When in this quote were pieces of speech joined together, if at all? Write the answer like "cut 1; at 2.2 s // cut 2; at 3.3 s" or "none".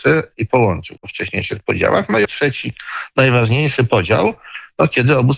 cut 1; at 1.0 s // cut 2; at 2.2 s